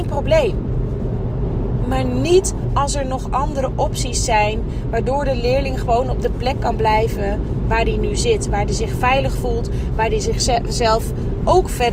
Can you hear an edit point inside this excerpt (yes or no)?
no